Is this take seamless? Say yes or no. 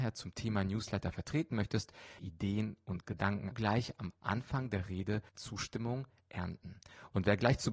no